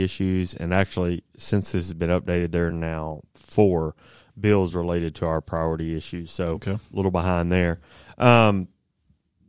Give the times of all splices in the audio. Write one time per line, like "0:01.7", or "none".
none